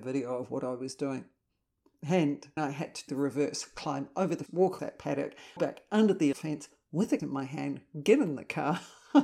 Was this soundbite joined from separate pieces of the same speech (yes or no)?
yes